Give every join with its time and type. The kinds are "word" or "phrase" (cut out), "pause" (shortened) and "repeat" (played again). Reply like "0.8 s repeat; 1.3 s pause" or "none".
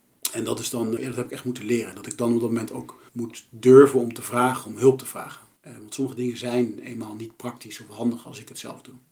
1.0 s word; 3.1 s pause; 5.6 s pause